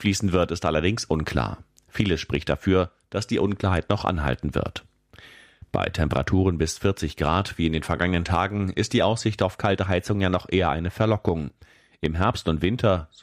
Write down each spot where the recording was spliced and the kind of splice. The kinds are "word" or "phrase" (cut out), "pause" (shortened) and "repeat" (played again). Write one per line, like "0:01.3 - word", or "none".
none